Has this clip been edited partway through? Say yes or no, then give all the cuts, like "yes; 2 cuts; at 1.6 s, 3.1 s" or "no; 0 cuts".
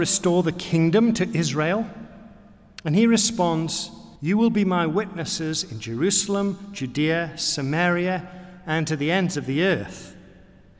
yes; 1 cut; at 4.2 s